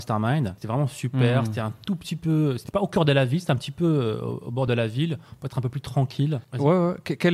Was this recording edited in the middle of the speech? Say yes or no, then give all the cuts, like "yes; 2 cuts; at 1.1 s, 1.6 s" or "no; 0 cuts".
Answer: no; 0 cuts